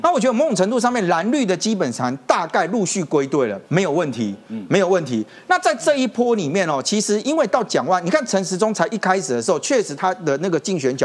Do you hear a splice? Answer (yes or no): yes